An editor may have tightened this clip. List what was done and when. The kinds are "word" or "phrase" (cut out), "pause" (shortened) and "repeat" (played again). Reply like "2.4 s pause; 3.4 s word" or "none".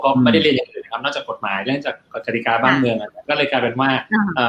3.2 s pause

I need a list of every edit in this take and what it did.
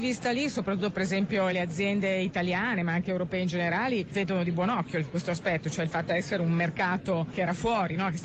1.5 s word; 6.1 s phrase

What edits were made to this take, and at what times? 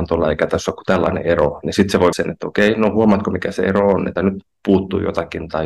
2.1 s word; 4.2 s word

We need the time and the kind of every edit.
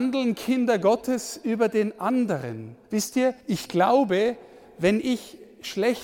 2.8 s pause; 3.4 s pause

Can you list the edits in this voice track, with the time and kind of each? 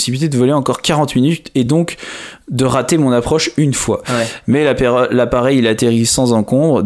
none

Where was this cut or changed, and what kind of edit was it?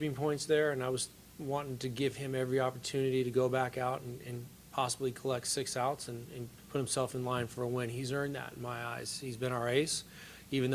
6.6 s pause

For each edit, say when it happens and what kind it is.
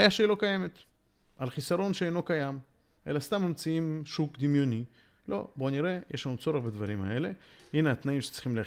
none

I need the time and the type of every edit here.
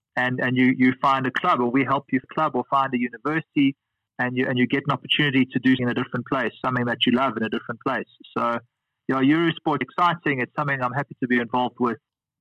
2.2 s word; 5.8 s word; 9.8 s word

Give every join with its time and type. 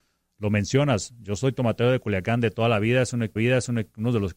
3.4 s repeat

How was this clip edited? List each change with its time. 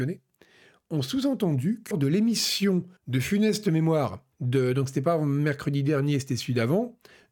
1.9 s word; 3.0 s pause; 4.3 s pause

